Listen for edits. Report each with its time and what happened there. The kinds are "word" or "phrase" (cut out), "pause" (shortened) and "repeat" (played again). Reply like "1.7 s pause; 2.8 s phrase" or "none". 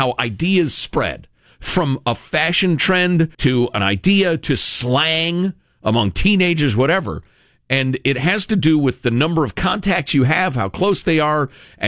3.3 s pause